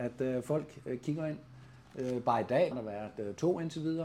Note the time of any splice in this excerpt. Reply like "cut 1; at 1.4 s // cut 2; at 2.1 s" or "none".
cut 1; at 2.7 s